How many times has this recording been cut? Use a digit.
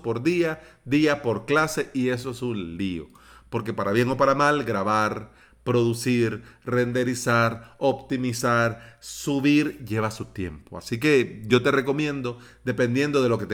0